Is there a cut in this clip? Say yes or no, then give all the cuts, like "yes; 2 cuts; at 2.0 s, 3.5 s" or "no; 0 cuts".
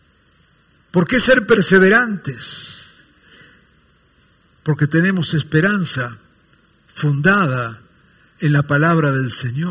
no; 0 cuts